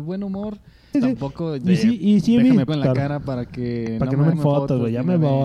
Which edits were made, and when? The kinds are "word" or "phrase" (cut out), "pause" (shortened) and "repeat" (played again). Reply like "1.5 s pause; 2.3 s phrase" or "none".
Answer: 0.9 s word; 2.7 s phrase; 4.3 s phrase